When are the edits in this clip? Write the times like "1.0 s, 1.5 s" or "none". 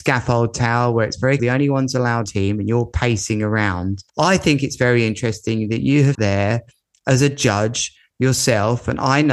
1.4 s, 2.3 s, 4.1 s, 6.1 s